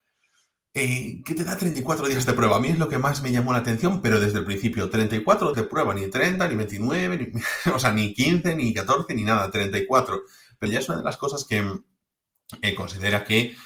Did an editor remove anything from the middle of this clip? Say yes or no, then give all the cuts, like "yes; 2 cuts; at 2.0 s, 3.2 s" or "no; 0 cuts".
yes; 2 cuts; at 5.5 s, 10.7 s